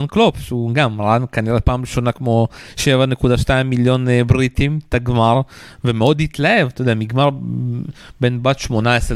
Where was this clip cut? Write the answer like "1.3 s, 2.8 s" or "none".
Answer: none